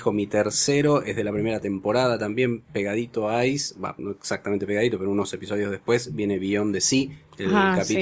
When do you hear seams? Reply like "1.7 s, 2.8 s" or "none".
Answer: 4.0 s